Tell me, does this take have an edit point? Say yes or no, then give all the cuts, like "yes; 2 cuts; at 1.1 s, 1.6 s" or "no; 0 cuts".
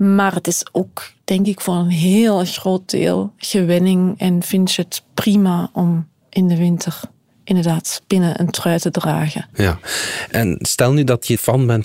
no; 0 cuts